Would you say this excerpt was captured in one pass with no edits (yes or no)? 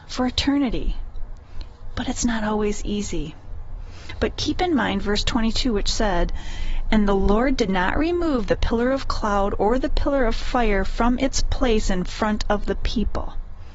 yes